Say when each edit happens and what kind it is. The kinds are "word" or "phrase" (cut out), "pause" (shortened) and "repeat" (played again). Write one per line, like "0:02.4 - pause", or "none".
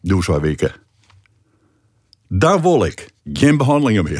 0:03.2 - pause